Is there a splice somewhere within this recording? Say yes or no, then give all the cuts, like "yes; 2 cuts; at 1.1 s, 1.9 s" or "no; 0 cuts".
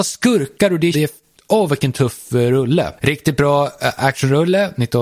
yes; 1 cut; at 0.9 s